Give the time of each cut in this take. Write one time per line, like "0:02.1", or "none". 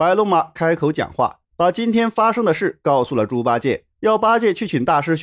0:01.4
0:03.9